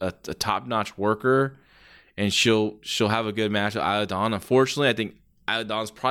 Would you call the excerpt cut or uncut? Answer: uncut